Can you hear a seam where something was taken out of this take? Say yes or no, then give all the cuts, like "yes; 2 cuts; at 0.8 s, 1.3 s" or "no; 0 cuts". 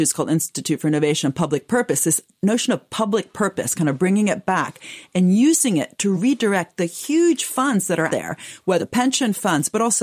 yes; 3 cuts; at 6.1 s, 8.1 s, 8.8 s